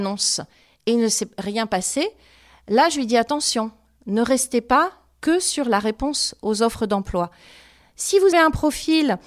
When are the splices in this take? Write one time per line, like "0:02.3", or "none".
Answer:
0:08.3